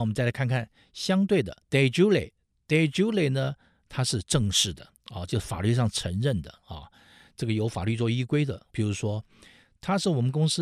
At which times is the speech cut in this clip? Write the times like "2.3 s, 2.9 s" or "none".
1.6 s, 4.9 s, 8.7 s